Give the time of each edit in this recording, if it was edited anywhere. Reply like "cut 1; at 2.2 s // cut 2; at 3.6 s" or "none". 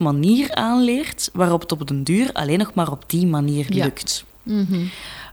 none